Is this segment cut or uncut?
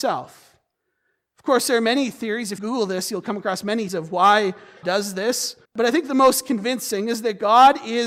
cut